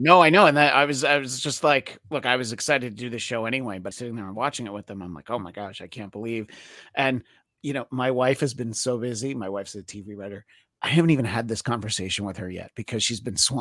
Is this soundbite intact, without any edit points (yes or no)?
no